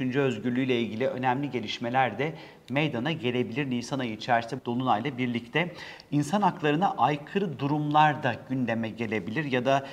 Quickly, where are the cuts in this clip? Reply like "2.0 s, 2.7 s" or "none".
4.6 s